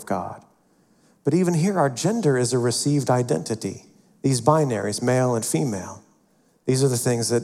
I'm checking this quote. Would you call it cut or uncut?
uncut